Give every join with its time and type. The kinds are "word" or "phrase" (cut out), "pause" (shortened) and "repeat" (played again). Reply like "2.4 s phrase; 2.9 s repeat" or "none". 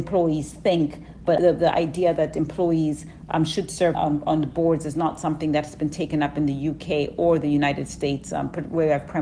3.9 s word